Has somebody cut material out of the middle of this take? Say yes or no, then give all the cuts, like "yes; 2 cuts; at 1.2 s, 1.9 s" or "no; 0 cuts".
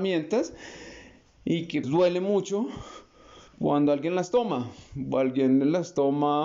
yes; 2 cuts; at 1.8 s, 3.5 s